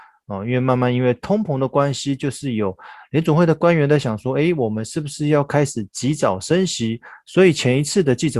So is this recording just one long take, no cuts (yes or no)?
yes